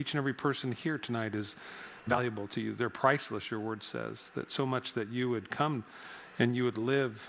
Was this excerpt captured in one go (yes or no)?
yes